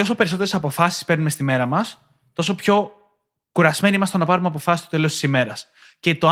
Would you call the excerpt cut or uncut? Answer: uncut